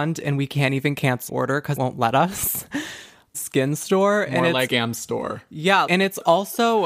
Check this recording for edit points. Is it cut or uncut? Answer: cut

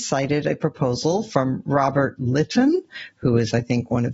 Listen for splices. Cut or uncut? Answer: uncut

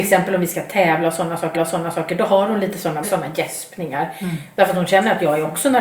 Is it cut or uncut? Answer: cut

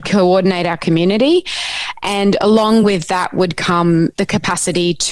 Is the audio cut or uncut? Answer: uncut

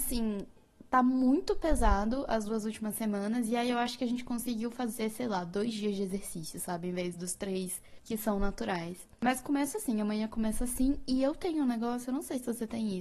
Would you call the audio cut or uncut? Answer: uncut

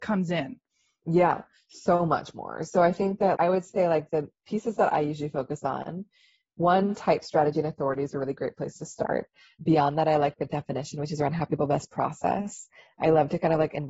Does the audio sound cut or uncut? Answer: cut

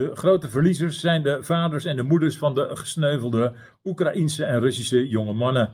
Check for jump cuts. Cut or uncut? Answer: uncut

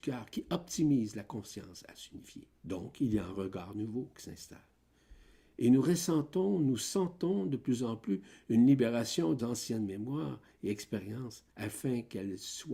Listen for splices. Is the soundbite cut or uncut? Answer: cut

